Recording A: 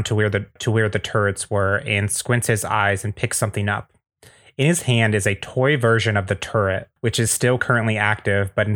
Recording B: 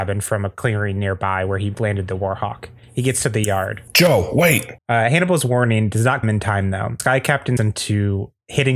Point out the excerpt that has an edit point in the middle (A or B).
B